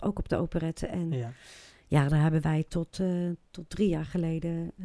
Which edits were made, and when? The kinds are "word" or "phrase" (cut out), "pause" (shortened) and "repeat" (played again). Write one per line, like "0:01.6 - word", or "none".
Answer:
none